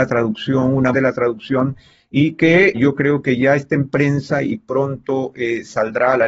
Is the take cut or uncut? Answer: cut